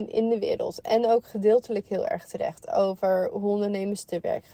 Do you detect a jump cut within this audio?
no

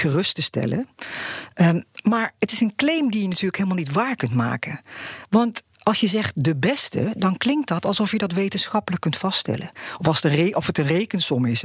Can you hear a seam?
no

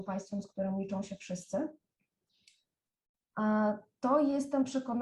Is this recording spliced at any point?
no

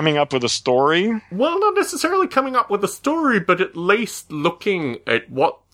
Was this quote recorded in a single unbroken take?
yes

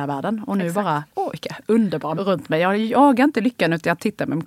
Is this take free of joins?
no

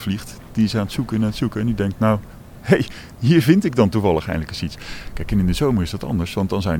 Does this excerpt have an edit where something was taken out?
no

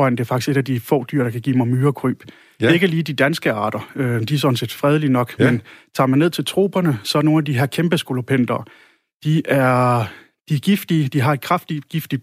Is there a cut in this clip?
no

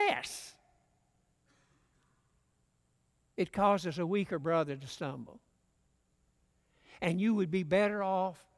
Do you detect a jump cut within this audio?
no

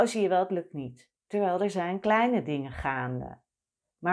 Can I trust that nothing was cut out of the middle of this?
no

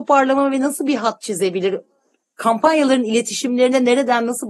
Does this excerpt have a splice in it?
no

